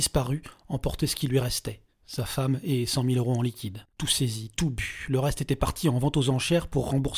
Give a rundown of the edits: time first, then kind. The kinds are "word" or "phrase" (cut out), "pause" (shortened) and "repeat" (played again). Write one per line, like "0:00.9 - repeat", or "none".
0:03.9 - pause